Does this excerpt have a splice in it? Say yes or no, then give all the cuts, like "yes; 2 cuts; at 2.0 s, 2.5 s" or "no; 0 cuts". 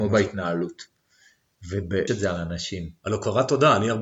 yes; 1 cut; at 2.1 s